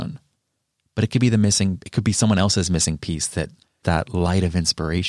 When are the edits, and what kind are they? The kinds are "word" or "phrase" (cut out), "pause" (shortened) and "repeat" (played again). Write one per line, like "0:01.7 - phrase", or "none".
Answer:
0:03.8 - phrase